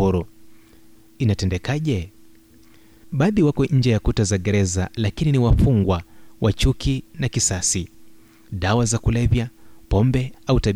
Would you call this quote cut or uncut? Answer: uncut